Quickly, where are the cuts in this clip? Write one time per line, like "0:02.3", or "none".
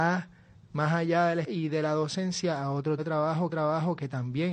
0:01.4
0:03.0
0:03.5